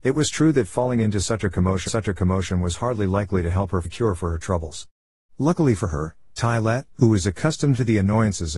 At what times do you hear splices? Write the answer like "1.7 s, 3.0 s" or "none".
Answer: 1.9 s, 3.8 s, 6.9 s